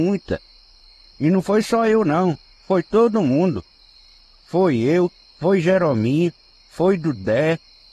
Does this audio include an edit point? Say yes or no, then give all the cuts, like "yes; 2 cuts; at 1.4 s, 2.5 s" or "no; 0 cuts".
no; 0 cuts